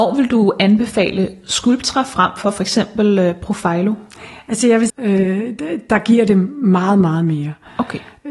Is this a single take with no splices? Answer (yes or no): no